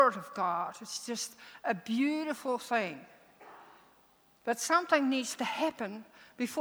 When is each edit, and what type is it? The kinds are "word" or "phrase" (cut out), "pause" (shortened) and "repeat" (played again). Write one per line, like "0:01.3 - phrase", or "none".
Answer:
none